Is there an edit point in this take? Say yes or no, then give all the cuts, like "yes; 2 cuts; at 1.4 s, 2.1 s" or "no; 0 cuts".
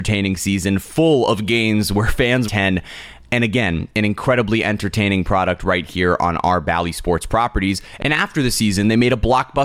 yes; 1 cut; at 2.5 s